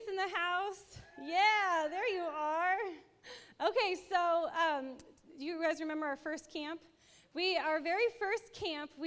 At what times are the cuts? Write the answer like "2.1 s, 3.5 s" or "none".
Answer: none